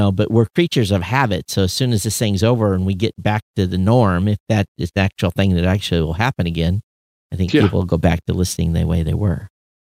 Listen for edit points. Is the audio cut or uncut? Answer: cut